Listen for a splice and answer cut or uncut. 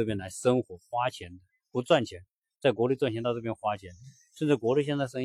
uncut